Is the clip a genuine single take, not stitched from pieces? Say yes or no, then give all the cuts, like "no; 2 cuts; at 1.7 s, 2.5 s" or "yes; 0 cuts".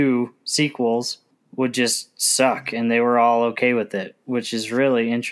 no; 1 cut; at 1.3 s